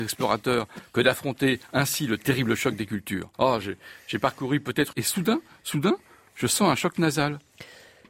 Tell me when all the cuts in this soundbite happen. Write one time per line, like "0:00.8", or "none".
0:03.3
0:04.9

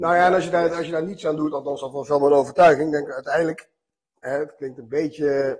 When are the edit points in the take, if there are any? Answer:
none

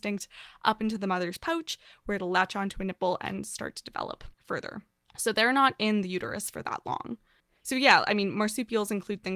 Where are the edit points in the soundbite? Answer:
0:04.3
0:07.4

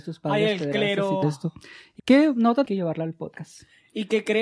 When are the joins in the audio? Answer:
0:01.2
0:02.0
0:02.6

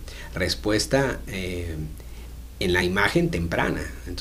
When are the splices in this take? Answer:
none

